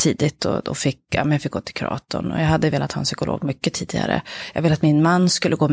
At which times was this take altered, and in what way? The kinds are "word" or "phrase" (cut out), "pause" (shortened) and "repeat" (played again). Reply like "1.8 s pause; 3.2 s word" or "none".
none